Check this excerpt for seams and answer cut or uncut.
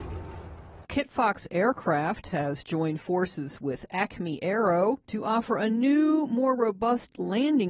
uncut